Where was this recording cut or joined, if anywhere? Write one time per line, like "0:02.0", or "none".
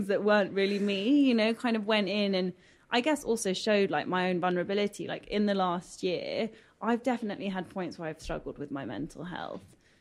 none

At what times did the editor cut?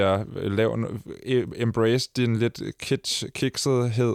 none

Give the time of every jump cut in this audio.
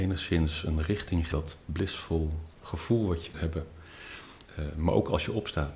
0:01.3
0:02.5
0:03.3
0:04.5

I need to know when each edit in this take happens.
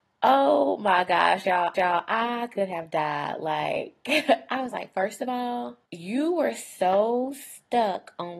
0:01.7
0:05.9

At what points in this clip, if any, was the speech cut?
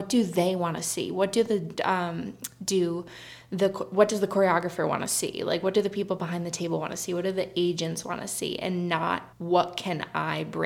0:01.8
0:09.3

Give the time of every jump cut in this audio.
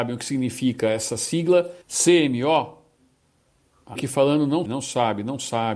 0:01.8
0:04.0
0:04.7

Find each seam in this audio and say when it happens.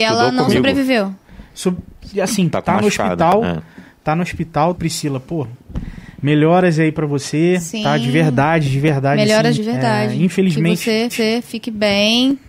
0:02.5
0:04.8
0:09.6
0:11.1

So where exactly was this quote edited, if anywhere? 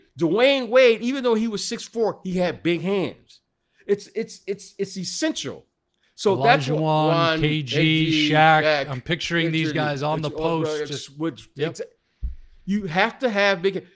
none

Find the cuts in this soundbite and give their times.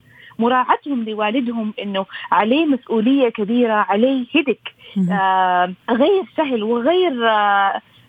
0:05.8

